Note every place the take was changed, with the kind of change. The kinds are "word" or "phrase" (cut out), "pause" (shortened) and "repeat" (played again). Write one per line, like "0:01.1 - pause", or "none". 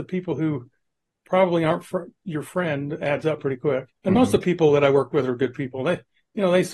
0:04.0 - pause